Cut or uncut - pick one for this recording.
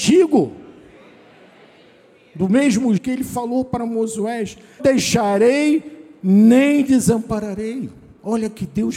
cut